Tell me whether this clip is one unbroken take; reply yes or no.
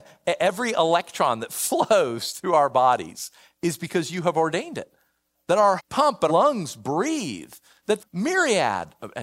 no